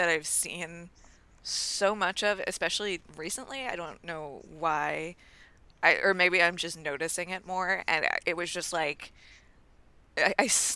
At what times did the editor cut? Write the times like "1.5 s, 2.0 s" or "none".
none